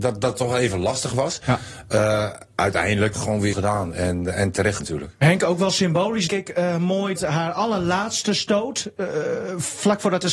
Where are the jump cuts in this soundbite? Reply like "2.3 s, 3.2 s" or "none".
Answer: 3.1 s, 3.5 s, 4.8 s, 6.3 s, 7.2 s